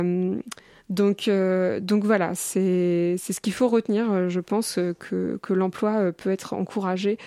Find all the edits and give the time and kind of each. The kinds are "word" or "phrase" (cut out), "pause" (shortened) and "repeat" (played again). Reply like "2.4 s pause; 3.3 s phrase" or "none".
none